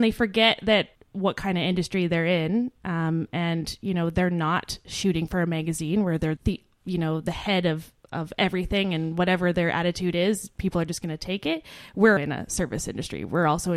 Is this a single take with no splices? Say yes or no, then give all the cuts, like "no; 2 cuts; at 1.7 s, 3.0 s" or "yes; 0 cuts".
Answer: no; 4 cuts; at 0.9 s, 6.4 s, 8.0 s, 12.2 s